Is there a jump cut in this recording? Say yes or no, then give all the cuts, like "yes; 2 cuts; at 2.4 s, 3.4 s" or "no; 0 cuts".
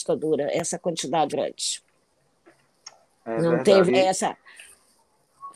yes; 2 cuts; at 1.3 s, 3.9 s